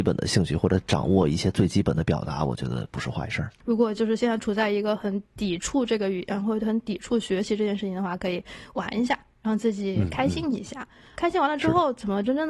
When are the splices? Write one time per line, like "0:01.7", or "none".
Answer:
0:03.6
0:09.4
0:11.2